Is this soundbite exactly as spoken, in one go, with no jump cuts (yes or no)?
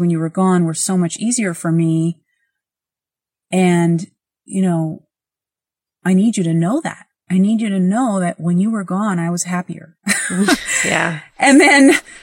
yes